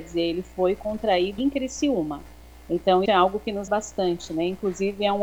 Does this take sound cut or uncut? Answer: cut